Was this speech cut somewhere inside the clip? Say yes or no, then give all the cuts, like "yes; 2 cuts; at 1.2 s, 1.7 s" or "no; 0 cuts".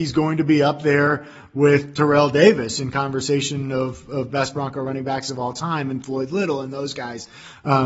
no; 0 cuts